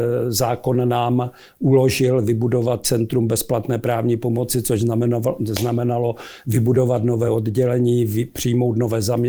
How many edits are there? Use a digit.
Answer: 0